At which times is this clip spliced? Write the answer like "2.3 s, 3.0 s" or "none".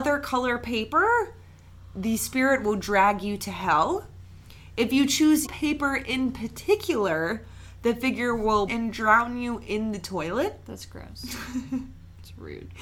5.5 s, 8.7 s